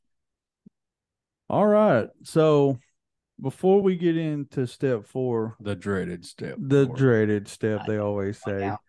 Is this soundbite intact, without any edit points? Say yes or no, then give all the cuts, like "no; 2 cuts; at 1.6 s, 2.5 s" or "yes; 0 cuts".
yes; 0 cuts